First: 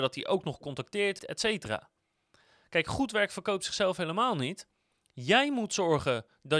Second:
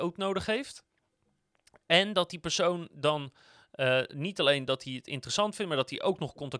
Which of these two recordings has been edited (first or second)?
first